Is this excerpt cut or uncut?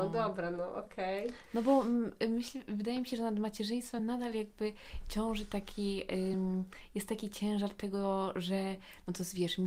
uncut